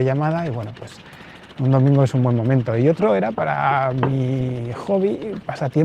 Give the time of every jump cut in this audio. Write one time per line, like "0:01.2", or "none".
none